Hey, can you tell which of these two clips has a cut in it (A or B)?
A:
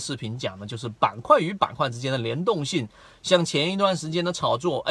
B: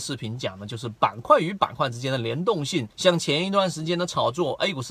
B